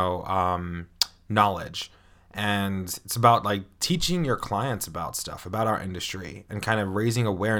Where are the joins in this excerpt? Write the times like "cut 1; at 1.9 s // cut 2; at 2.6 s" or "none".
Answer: none